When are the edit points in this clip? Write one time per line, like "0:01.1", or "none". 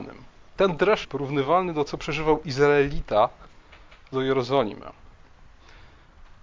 0:01.0
0:01.9
0:04.1